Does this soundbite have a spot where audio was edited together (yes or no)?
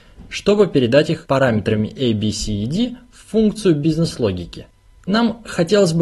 no